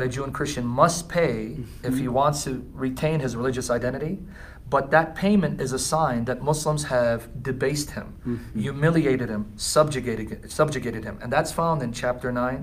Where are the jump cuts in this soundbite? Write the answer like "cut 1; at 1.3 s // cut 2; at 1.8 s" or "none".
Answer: none